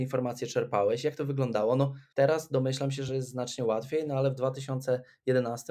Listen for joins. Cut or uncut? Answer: uncut